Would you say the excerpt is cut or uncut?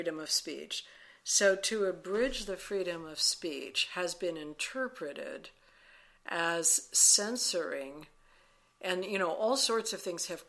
uncut